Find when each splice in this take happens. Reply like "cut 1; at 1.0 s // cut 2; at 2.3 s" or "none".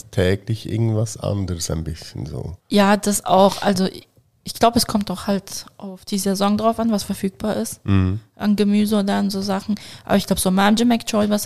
cut 1; at 2.6 s